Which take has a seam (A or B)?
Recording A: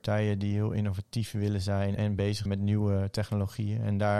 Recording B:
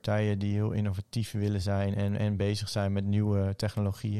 A